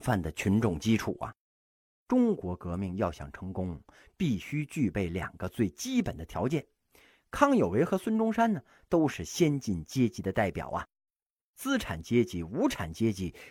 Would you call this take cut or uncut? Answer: uncut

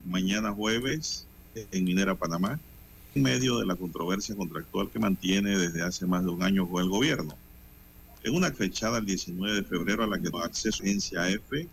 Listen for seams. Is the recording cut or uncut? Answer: cut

